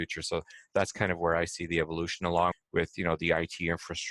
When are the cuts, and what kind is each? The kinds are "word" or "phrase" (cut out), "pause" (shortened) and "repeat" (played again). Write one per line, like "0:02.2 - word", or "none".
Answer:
0:02.5 - word